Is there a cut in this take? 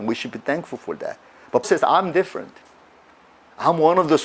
yes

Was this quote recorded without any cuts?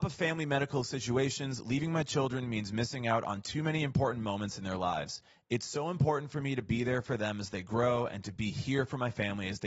yes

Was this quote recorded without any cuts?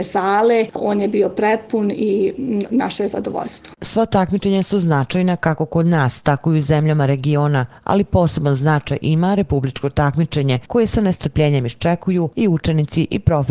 yes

